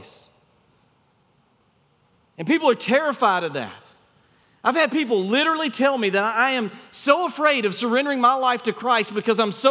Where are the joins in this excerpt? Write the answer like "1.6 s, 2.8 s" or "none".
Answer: none